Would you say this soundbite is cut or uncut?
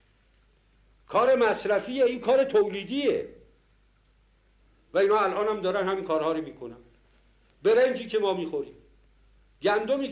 uncut